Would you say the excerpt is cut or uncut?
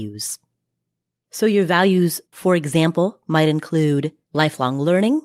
cut